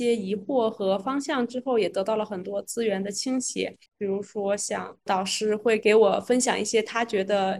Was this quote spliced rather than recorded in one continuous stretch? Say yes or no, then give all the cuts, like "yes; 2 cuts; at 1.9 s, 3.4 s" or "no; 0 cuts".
yes; 1 cut; at 3.9 s